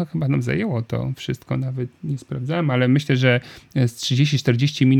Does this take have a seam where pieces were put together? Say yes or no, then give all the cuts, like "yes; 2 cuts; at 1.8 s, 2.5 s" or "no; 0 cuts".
no; 0 cuts